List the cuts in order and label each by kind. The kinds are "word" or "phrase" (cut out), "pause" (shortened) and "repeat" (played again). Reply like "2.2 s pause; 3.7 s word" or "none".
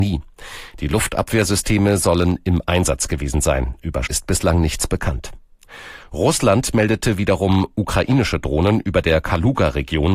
4.1 s word